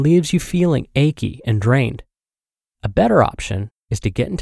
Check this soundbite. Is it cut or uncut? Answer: uncut